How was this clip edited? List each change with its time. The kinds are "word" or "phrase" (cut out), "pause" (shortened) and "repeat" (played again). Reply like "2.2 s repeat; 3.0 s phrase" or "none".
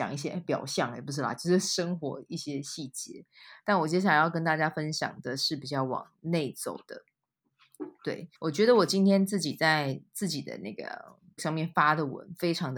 8.3 s pause; 11.4 s word